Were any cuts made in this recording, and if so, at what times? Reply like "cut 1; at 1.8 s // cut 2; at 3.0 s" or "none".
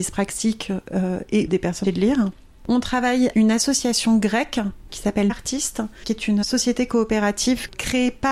cut 1; at 1.5 s // cut 2; at 1.8 s // cut 3; at 3.3 s // cut 4; at 4.9 s // cut 5; at 5.3 s // cut 6; at 6.4 s